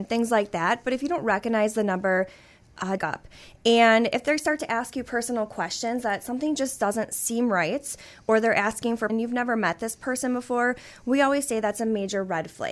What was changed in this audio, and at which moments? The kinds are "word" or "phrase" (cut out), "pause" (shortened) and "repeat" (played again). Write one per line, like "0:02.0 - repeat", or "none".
0:03.0 - phrase
0:09.1 - phrase